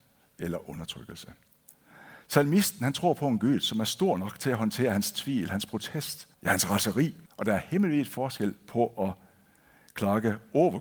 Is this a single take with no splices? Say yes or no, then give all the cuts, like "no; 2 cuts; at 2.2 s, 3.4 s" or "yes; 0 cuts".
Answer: no; 2 cuts; at 6.3 s, 7.3 s